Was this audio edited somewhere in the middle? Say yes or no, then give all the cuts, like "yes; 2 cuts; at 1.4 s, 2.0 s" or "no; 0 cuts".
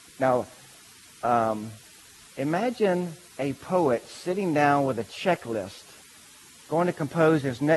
no; 0 cuts